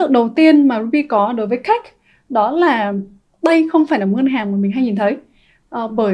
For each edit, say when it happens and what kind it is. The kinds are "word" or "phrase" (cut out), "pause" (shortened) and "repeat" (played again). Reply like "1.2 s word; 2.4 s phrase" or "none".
none